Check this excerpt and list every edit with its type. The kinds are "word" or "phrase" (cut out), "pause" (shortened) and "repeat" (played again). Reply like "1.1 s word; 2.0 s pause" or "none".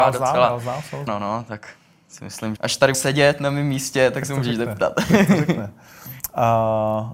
1.1 s word; 2.6 s word; 2.9 s word